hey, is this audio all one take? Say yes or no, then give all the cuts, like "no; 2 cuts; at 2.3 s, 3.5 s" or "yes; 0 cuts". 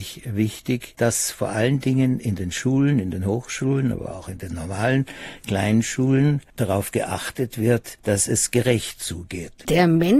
yes; 0 cuts